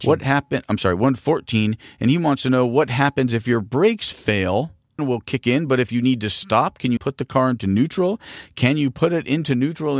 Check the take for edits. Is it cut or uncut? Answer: cut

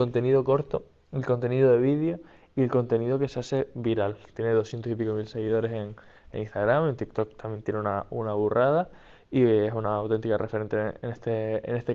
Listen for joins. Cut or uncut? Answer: uncut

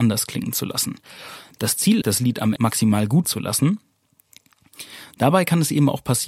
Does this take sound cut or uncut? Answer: cut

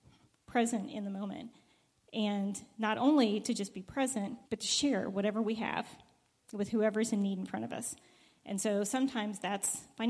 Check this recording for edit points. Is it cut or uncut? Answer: cut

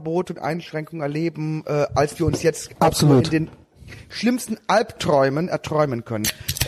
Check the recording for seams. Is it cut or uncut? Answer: uncut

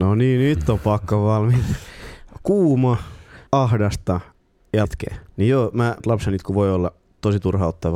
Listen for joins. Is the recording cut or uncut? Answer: cut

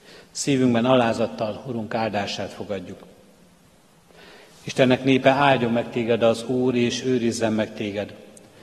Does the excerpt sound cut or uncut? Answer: uncut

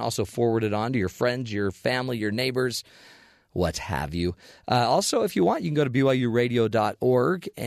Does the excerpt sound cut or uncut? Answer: uncut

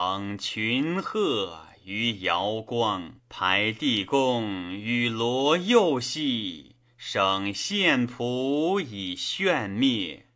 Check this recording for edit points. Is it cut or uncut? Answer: cut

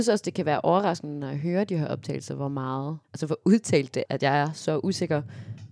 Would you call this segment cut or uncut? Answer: cut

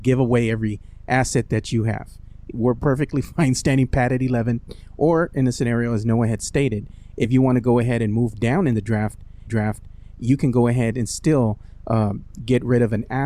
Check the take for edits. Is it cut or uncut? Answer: cut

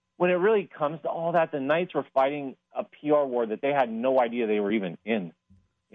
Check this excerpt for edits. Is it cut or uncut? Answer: uncut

